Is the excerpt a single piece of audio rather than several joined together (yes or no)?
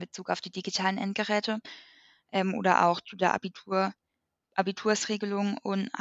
yes